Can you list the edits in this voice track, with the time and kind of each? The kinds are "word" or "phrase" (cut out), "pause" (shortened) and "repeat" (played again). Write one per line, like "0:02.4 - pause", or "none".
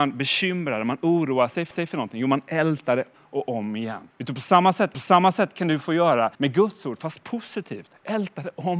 0:01.7 - repeat
0:03.1 - word
0:04.1 - pause
0:04.9 - repeat
0:06.3 - pause